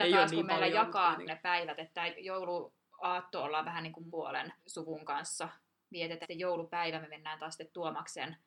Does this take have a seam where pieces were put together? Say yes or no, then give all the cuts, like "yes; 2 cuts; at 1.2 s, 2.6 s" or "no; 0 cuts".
yes; 4 cuts; at 1.3 s, 4.1 s, 4.6 s, 6.2 s